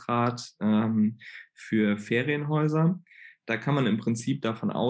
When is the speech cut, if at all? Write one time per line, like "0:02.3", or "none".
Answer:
none